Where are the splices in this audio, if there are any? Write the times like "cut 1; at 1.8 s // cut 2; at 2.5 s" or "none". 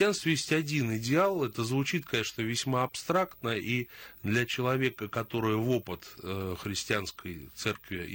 none